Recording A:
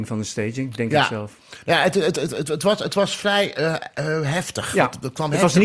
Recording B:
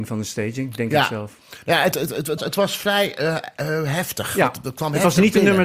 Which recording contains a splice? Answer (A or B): B